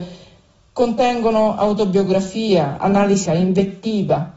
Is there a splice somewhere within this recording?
yes; 2 cuts; at 2.8 s, 3.3 s

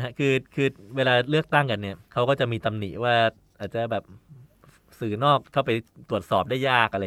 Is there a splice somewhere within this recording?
no; 0 cuts

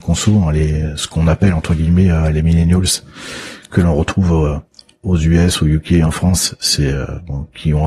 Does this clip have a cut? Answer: no; 0 cuts

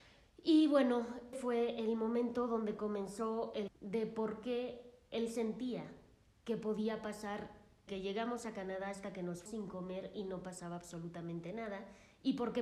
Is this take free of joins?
no; 4 cuts; at 1.3 s, 3.7 s, 7.9 s, 9.5 s

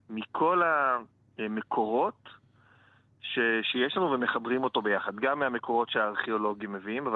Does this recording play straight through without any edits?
yes; 0 cuts

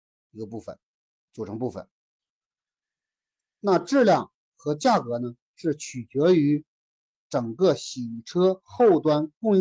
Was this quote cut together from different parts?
no; 0 cuts

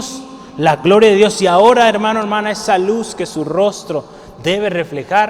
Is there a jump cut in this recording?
no; 0 cuts

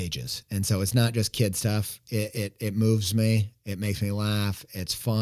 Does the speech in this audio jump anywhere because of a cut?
no; 0 cuts

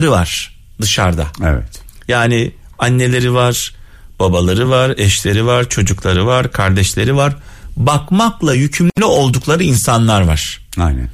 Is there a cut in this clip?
no; 0 cuts

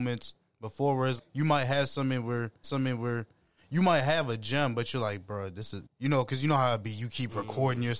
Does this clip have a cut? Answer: yes; 3 cuts; at 1.2 s, 2.6 s, 5.9 s

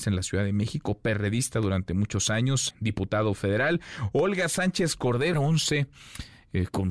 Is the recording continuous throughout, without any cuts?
no; 2 cuts; at 2.7 s, 5.3 s

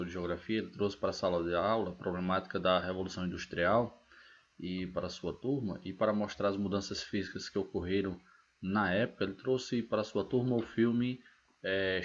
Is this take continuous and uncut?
yes; 0 cuts

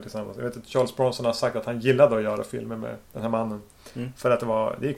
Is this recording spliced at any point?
yes; 1 cut; at 3.0 s

